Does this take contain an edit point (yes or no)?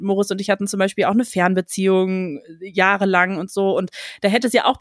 no